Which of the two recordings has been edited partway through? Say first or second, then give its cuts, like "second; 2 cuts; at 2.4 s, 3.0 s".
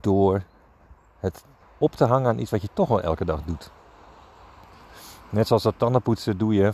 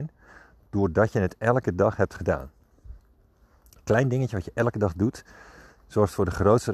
first; 1 cut; at 1.6 s